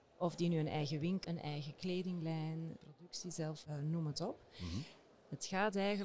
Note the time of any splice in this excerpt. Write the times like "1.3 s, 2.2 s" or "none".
1.2 s, 2.8 s, 3.6 s